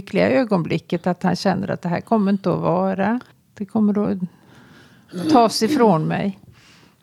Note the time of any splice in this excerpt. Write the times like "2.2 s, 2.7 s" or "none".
3.3 s

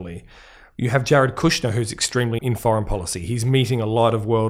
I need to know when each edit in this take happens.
2.4 s

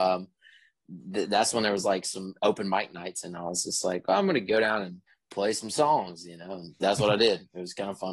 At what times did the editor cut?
5.1 s

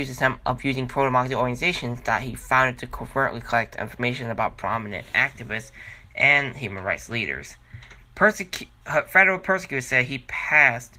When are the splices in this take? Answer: 8.0 s

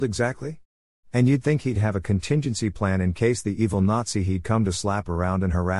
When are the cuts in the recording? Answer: none

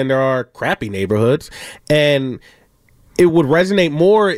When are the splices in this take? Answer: none

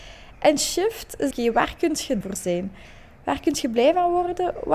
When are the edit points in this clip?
1.3 s, 2.2 s

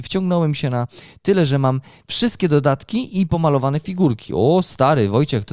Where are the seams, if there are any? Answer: none

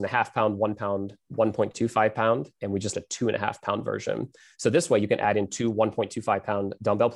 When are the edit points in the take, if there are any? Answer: 2.9 s

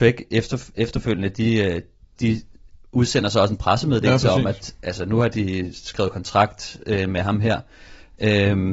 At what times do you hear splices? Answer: none

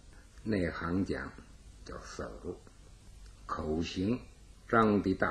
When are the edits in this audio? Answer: none

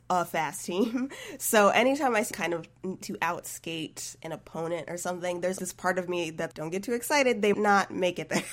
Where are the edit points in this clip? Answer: 2.3 s, 3.0 s, 5.6 s, 6.5 s, 7.5 s

